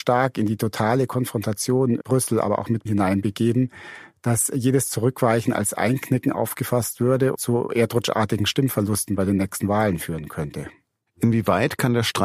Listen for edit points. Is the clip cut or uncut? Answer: cut